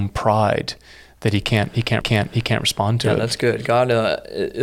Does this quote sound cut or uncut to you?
cut